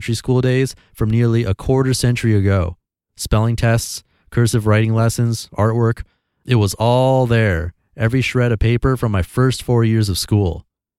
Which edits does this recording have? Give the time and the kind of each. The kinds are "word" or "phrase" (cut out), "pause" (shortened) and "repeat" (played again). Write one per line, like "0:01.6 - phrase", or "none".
none